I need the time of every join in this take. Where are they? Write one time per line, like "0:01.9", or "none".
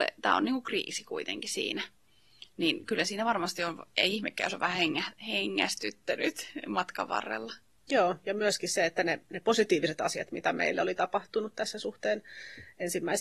none